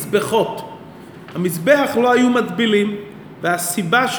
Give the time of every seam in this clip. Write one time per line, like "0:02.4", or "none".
none